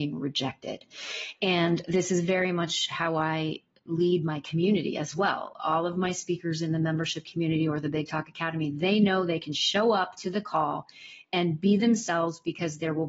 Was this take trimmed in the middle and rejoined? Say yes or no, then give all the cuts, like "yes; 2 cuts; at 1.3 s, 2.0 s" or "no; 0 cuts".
no; 0 cuts